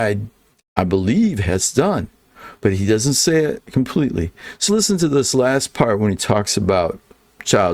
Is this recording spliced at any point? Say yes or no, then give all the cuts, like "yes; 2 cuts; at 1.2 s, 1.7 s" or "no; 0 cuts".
yes; 1 cut; at 4.7 s